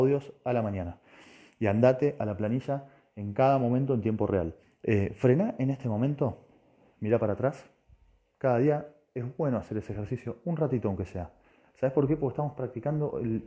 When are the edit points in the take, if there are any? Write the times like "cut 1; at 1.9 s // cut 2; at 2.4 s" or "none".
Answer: cut 1; at 4.6 s